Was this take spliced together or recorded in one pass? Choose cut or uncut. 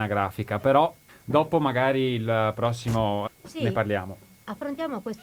cut